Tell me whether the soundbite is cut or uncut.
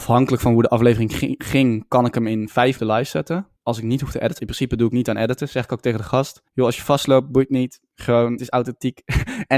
cut